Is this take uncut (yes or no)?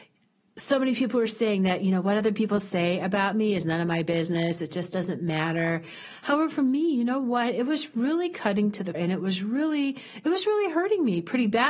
no